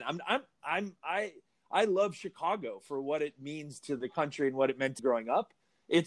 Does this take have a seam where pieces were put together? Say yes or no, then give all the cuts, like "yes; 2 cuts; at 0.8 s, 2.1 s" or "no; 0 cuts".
yes; 1 cut; at 5.0 s